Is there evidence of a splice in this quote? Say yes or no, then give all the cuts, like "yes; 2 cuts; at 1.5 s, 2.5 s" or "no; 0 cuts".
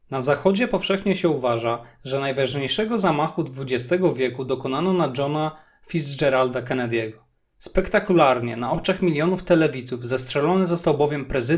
no; 0 cuts